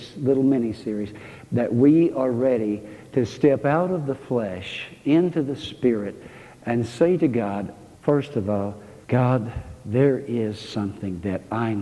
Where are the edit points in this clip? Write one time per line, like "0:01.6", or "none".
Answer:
none